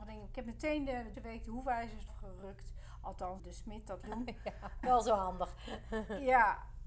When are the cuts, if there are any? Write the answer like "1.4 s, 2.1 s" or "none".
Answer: 1.1 s, 2.1 s, 3.4 s, 4.0 s, 4.8 s